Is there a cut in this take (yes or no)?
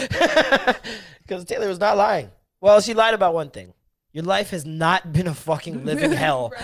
no